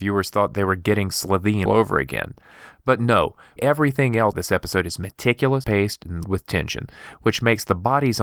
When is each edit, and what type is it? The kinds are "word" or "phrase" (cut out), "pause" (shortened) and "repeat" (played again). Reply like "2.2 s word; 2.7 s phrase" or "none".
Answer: 1.7 s word; 3.6 s word; 4.3 s word; 5.6 s word; 6.2 s word